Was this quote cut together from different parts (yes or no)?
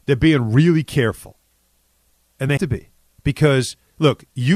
yes